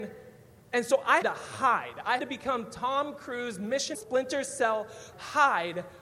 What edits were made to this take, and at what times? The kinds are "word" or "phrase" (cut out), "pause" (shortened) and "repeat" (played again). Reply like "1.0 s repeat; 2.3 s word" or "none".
1.2 s word; 2.2 s word; 3.9 s word; 5.1 s word